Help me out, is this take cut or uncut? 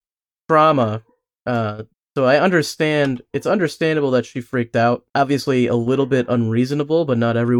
cut